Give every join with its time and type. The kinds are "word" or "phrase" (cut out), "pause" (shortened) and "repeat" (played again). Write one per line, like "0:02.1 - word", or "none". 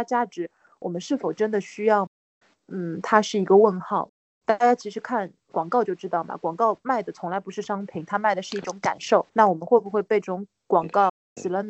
0:09.3 - pause